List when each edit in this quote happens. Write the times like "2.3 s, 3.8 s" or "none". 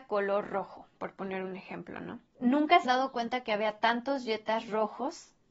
1.0 s, 2.3 s, 2.8 s